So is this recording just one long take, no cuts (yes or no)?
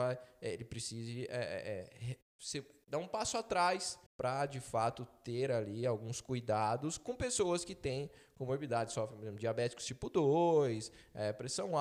no